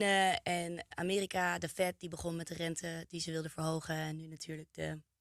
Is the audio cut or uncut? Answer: cut